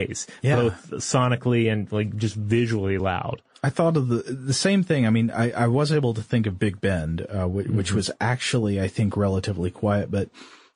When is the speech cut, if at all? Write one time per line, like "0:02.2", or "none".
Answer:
none